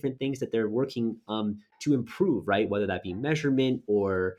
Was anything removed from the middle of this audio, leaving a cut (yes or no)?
no